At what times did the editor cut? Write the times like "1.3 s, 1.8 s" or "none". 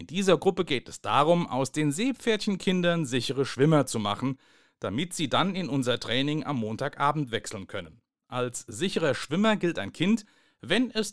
none